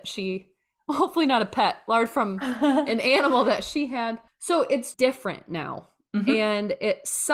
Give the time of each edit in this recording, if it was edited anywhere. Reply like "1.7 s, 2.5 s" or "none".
4.3 s, 4.9 s